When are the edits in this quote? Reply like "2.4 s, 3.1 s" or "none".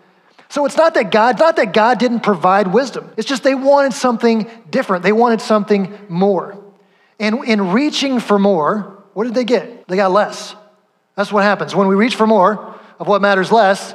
1.4 s, 3.1 s, 9.8 s